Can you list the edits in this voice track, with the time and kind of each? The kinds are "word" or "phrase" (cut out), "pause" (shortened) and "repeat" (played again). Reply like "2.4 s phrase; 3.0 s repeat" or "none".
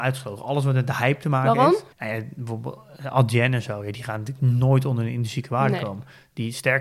1.9 s pause